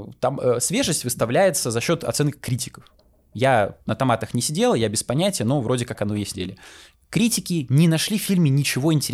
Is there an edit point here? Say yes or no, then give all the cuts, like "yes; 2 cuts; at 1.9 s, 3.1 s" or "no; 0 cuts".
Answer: yes; 3 cuts; at 5.9 s, 6.3 s, 6.9 s